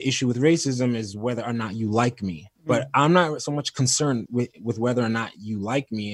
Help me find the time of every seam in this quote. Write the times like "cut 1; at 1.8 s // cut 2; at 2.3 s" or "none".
cut 1; at 2.5 s // cut 2; at 4.3 s